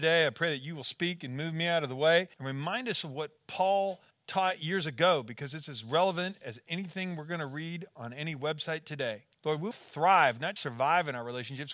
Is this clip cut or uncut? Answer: cut